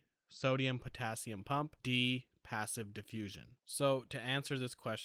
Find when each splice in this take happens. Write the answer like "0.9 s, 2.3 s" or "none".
1.8 s, 3.6 s